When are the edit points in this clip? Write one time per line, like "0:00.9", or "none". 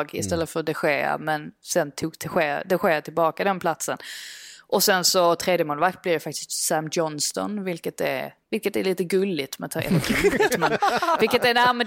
0:08.4